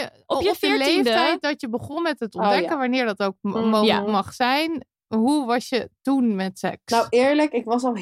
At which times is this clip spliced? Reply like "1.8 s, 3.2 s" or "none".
none